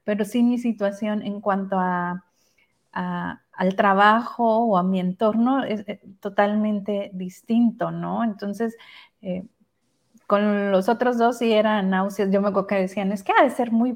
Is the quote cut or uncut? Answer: uncut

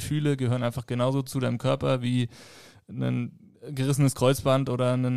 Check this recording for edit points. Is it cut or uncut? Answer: uncut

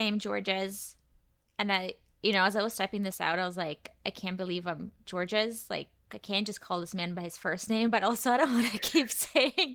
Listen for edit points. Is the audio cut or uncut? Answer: uncut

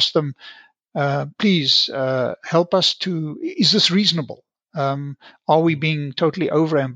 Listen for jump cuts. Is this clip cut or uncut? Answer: uncut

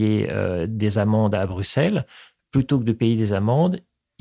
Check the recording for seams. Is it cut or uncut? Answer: uncut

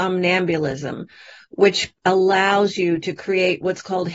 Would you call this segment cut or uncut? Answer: cut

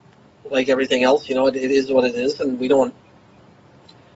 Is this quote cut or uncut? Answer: uncut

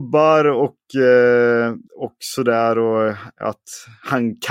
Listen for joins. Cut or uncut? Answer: cut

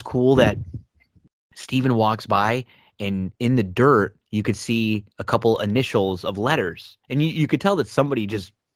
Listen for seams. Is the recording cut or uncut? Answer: cut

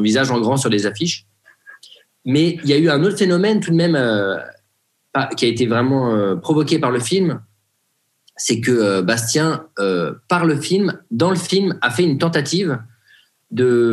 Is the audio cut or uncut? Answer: uncut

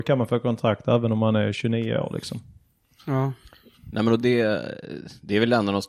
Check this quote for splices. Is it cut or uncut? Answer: uncut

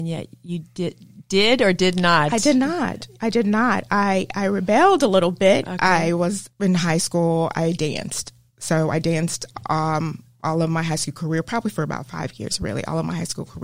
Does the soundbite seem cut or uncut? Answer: uncut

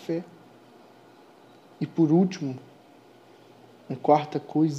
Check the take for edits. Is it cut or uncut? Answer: uncut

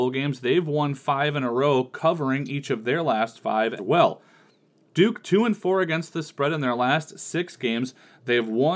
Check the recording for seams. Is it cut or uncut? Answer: cut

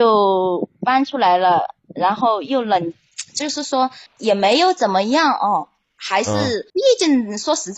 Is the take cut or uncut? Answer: cut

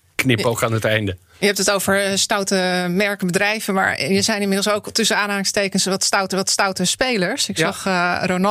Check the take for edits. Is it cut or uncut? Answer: cut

